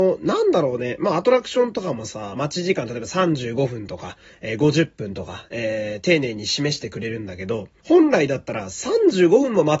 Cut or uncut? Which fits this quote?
cut